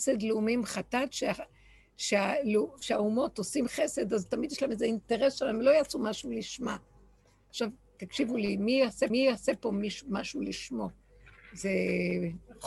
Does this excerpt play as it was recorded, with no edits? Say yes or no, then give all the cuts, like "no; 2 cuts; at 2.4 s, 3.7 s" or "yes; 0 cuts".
no; 1 cut; at 9.1 s